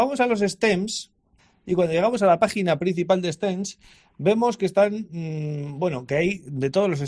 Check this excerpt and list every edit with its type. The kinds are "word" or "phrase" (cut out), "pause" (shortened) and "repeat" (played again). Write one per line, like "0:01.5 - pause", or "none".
none

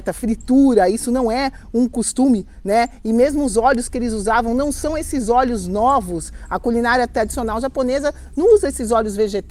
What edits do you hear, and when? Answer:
none

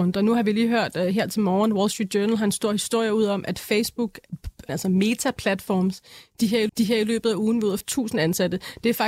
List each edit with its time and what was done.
0:04.7 - word
0:06.7 - repeat
0:07.8 - phrase

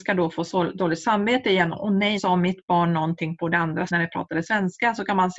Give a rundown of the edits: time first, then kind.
0:02.2 - word
0:03.9 - word

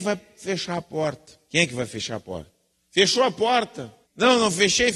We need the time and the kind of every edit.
0:01.5 - pause
0:02.7 - pause
0:04.0 - pause

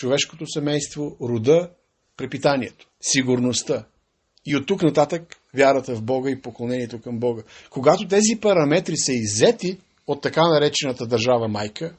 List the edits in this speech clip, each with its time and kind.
none

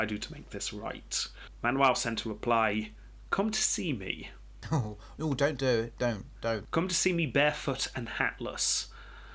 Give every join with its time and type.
0:05.2 - word

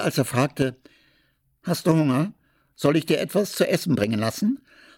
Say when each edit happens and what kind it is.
none

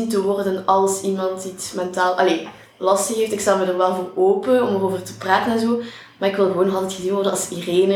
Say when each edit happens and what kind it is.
none

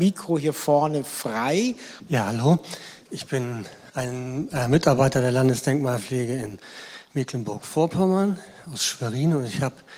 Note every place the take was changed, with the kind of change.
0:03.0 - pause

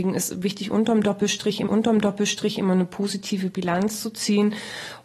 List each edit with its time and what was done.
0:01.7 - repeat

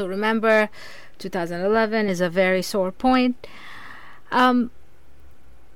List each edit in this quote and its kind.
0:02.1 - phrase

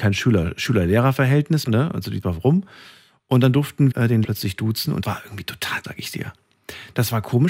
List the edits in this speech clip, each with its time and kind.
0:01.7 - word
0:02.2 - word
0:03.9 - word
0:04.2 - word
0:05.0 - word
0:05.8 - word

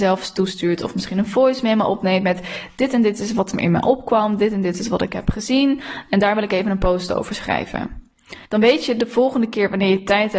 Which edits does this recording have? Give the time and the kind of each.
0:08.4 - pause

